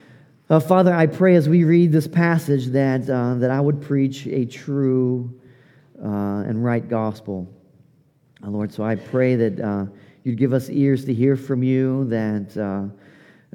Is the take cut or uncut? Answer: uncut